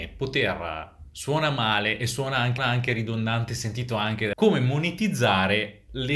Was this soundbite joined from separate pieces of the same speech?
yes; 2 cuts; at 2.6 s, 4.3 s

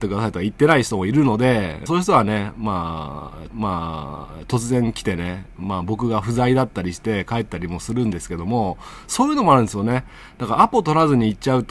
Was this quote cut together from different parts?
yes; 2 cuts; at 1.9 s, 3.5 s

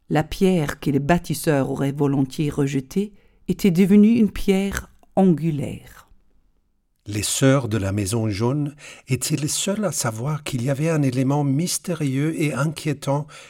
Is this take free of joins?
yes; 0 cuts

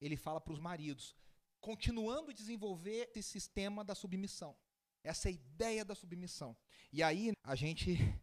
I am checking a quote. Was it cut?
yes; 2 cuts; at 3.1 s, 7.3 s

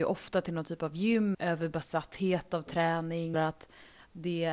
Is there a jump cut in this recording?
yes; 2 cuts; at 1.3 s, 3.3 s

